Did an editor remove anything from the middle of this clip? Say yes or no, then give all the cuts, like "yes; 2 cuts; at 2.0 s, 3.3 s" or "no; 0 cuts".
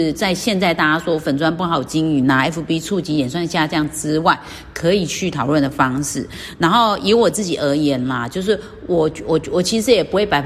no; 0 cuts